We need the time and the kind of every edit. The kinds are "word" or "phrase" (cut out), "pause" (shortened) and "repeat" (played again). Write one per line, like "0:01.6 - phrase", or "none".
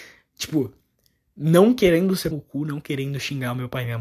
0:02.3 - word